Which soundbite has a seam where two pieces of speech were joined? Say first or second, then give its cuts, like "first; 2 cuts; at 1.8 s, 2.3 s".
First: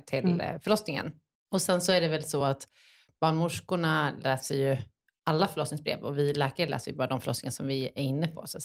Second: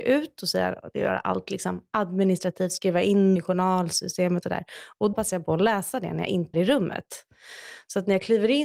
second; 4 cuts; at 3.4 s, 4.4 s, 5.1 s, 6.5 s